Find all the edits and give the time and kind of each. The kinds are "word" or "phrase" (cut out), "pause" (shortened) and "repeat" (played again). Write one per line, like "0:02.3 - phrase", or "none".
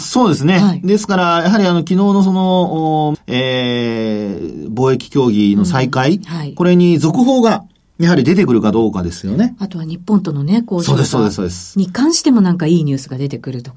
0:03.1 - phrase